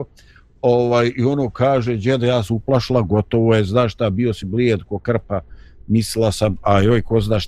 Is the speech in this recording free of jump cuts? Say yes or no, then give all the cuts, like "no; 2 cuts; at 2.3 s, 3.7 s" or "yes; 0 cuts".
yes; 0 cuts